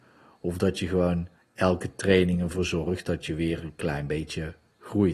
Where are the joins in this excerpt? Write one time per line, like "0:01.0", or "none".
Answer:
0:01.4